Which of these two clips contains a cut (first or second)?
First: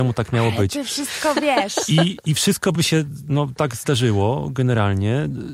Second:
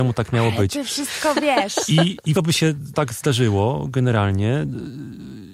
second